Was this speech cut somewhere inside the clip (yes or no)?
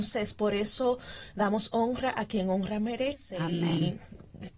no